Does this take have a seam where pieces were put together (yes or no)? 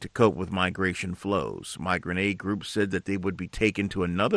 no